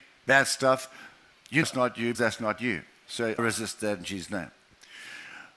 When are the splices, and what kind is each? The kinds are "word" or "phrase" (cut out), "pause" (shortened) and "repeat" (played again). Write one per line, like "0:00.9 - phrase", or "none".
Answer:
0:01.6 - word
0:02.1 - word
0:03.4 - word